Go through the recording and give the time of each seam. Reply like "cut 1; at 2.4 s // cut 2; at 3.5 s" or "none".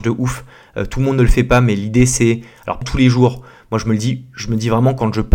cut 1; at 2.8 s